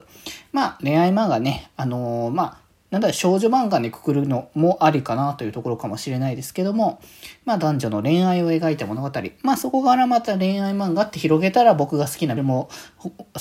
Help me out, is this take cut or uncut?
cut